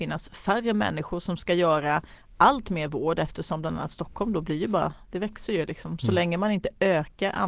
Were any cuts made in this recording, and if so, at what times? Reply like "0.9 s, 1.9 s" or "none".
none